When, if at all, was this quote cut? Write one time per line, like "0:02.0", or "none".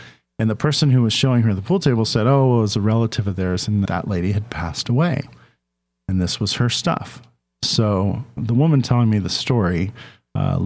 0:03.9
0:08.4

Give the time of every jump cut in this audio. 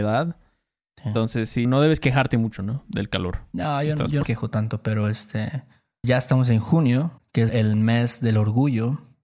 0:01.6
0:04.2
0:06.0
0:07.5

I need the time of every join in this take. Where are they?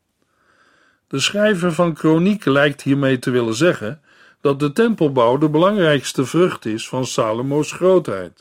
none

